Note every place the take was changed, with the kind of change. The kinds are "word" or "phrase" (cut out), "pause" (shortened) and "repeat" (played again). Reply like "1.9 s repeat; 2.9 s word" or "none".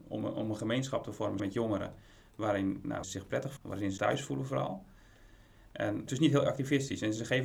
1.4 s word; 3.0 s word; 3.6 s word; 4.0 s word; 6.1 s word